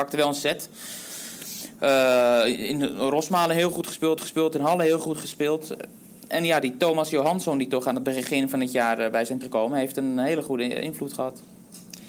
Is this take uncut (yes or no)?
no